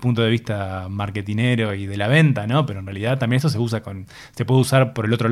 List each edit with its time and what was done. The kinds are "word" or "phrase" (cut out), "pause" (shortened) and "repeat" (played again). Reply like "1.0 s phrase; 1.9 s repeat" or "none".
none